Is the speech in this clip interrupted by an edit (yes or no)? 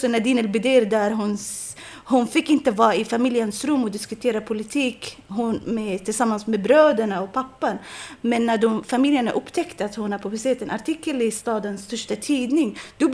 no